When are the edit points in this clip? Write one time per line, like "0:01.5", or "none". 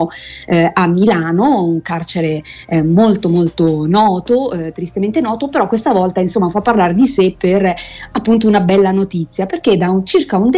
none